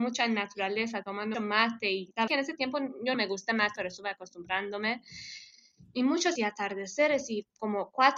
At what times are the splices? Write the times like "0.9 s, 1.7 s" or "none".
1.3 s, 2.3 s, 3.1 s, 3.8 s, 6.4 s